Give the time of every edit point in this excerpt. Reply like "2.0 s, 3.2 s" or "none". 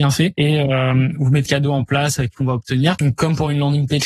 1.5 s, 2.3 s

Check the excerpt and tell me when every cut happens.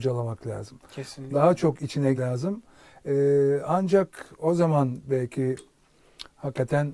2.1 s

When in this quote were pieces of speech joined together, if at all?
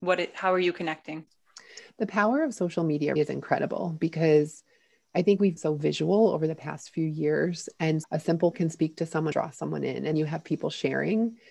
3.2 s, 5.6 s, 8.0 s, 8.5 s, 9.3 s, 10.1 s

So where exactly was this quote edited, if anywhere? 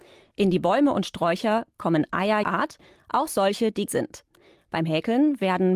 2.4 s, 3.9 s

